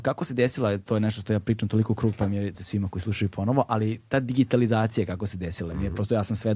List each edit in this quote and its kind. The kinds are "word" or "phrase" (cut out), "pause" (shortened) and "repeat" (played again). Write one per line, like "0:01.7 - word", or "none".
0:02.5 - word